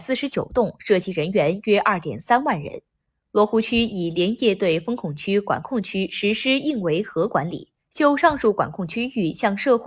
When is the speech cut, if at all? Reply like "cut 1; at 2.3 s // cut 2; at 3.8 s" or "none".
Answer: cut 1; at 3.0 s // cut 2; at 7.8 s